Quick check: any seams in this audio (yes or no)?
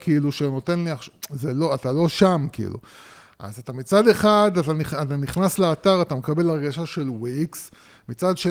no